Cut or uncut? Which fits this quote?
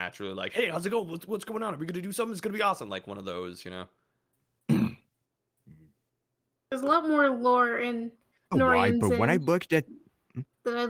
uncut